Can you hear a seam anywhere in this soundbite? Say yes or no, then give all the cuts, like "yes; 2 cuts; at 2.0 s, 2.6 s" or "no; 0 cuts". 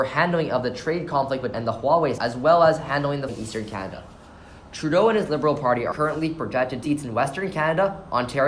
yes; 5 cuts; at 1.5 s, 2.2 s, 3.3 s, 5.9 s, 6.8 s